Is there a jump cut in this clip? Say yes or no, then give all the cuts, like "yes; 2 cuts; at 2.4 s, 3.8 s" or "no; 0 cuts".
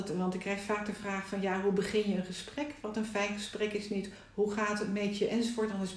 no; 0 cuts